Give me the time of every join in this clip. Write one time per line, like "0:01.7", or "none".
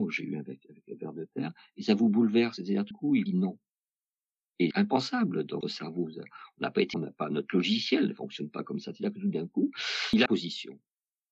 0:02.9
0:03.3
0:04.7
0:05.6
0:06.9
0:10.3